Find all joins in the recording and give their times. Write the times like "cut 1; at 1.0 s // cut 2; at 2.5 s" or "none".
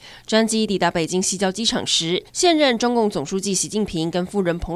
cut 1; at 2.3 s